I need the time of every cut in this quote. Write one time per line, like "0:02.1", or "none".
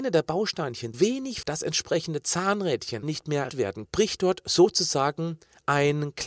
0:00.9
0:01.4
0:03.0
0:03.5
0:03.8